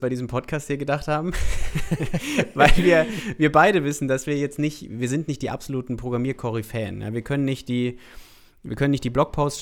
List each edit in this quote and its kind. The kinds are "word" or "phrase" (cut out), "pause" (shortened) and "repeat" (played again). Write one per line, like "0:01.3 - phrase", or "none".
none